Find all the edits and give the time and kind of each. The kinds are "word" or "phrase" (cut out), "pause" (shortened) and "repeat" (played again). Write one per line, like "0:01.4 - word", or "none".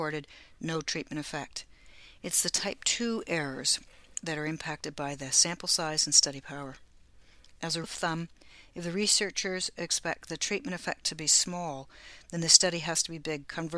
0:07.8 - word